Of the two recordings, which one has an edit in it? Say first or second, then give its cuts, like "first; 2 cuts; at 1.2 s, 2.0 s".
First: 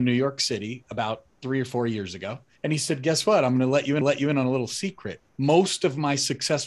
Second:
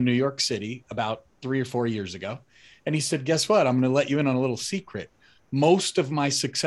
first; 3 cuts; at 2.6 s, 4.0 s, 5.3 s